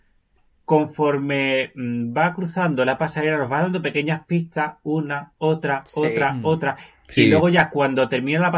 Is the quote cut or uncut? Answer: uncut